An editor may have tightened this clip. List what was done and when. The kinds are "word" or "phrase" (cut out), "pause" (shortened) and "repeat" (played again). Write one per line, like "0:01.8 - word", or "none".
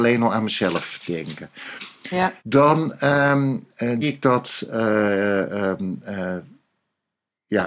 0:02.4 - pause
0:04.0 - word